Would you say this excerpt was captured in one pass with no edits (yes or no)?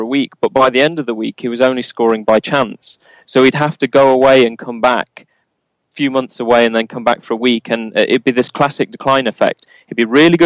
yes